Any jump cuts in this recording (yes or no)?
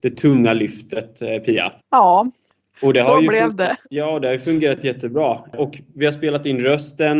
yes